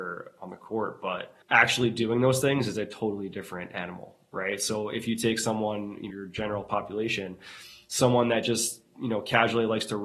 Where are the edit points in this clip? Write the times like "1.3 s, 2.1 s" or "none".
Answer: 1.4 s, 6.1 s